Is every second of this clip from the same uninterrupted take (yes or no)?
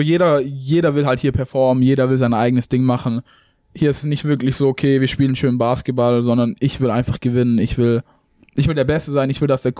yes